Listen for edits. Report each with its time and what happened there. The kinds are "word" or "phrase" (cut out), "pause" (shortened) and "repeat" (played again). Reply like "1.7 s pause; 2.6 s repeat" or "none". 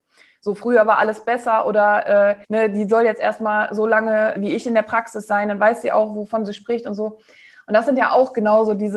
2.4 s pause; 4.4 s word